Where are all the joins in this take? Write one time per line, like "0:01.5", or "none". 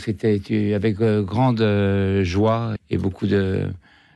0:02.8

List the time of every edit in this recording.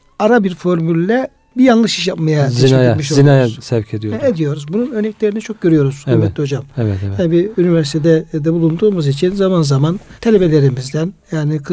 0:10.2

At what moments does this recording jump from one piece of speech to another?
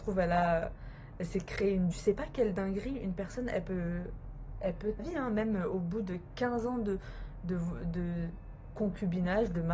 0:01.9
0:05.0

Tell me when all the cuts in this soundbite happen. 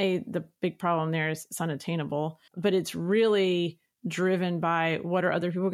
0:02.5

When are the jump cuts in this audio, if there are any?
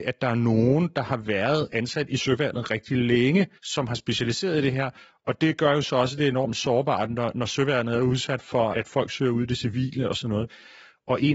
0:03.6
0:08.7

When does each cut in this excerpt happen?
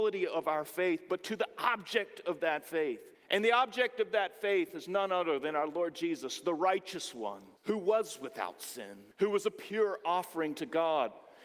0:03.1
0:07.6
0:09.1

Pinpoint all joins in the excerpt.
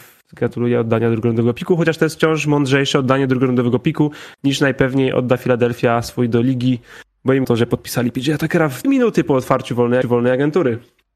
0:07.4
0:08.8
0:10.0

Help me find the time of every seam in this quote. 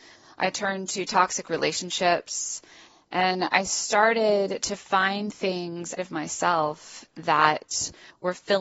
0:06.0

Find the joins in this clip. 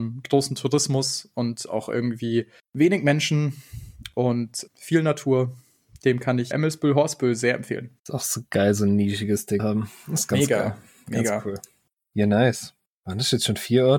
0:02.6
0:04.7
0:06.5
0:08.0
0:09.6

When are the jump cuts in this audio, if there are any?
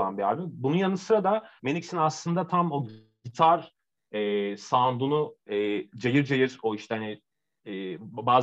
0:01.6

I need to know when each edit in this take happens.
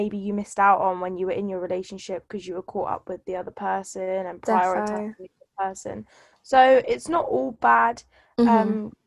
none

